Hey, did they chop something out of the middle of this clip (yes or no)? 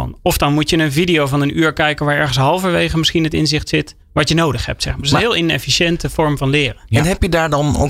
yes